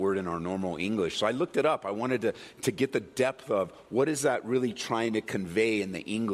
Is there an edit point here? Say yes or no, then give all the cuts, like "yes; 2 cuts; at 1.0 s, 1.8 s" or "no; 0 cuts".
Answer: no; 0 cuts